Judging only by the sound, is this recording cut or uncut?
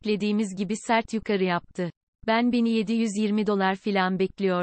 cut